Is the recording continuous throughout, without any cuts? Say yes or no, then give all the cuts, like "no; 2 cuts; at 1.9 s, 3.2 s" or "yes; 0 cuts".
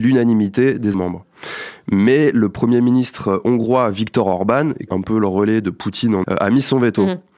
no; 3 cuts; at 0.9 s, 4.9 s, 6.2 s